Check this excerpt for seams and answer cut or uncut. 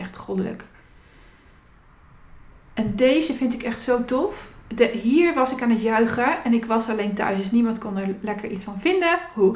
uncut